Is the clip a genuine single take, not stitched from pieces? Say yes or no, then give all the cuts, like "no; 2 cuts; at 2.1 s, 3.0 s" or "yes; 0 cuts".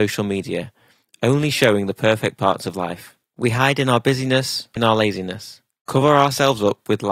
no; 1 cut; at 4.8 s